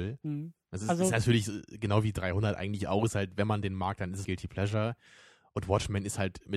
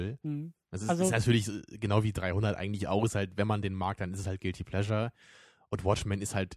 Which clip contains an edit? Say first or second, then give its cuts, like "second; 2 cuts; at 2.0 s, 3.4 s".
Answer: first; 1 cut; at 4.2 s